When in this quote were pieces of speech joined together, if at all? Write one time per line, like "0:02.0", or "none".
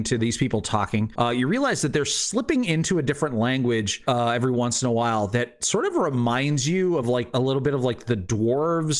none